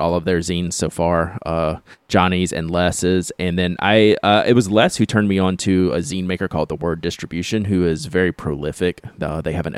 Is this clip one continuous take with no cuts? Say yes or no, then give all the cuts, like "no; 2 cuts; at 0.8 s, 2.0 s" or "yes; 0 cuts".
no; 1 cut; at 2.0 s